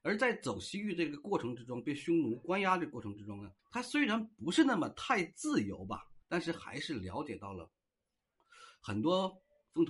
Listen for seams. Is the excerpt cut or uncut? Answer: cut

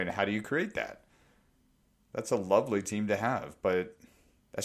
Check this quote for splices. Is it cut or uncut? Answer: uncut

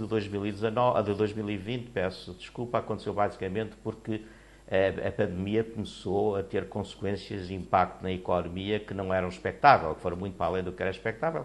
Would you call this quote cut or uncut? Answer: uncut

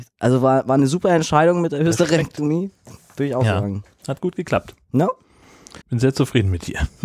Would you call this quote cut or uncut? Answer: cut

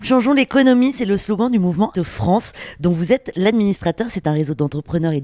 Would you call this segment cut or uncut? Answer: cut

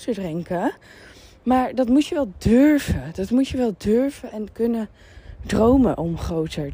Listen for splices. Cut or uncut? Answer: uncut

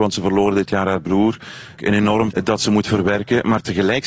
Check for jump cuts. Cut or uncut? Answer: cut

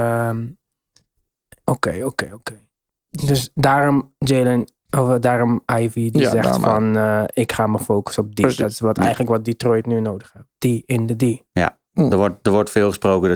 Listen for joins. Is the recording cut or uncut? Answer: uncut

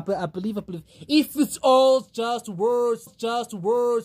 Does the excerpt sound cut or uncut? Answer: cut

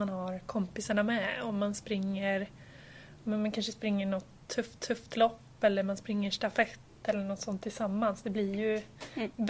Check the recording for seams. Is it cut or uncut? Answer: cut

